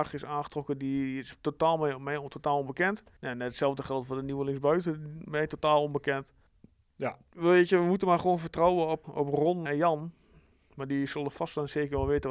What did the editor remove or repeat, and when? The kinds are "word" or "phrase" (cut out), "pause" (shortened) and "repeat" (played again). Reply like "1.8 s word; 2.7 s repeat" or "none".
3.2 s pause; 6.5 s pause; 9.0 s word; 9.7 s word